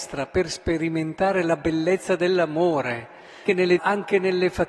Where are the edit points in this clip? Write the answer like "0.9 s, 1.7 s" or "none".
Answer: 3.5 s, 3.8 s